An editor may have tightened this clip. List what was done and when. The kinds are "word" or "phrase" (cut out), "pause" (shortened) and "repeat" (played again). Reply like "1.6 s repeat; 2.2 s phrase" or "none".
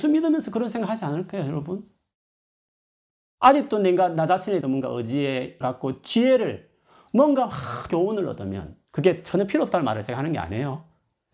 4.6 s word; 5.6 s word; 7.9 s word